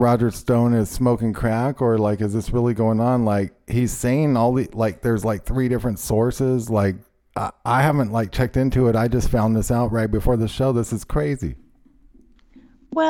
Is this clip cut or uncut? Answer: uncut